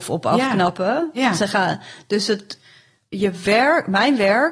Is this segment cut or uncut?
uncut